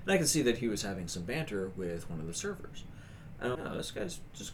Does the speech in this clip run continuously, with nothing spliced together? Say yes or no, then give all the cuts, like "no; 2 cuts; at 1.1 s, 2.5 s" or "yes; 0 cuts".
no; 1 cut; at 3.5 s